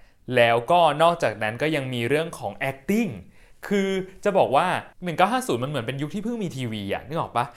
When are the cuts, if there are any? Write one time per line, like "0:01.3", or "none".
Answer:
none

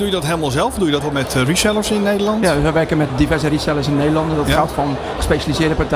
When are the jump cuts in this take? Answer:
0:01.0
0:03.1

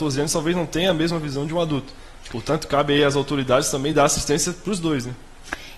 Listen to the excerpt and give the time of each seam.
none

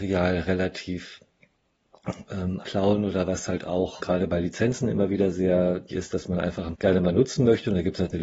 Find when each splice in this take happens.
0:02.6
0:04.0
0:05.9
0:06.7

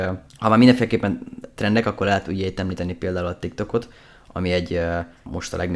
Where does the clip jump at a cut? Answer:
none

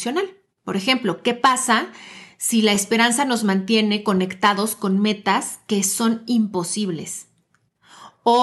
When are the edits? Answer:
none

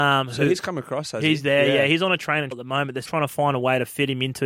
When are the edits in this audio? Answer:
0:02.5
0:03.0

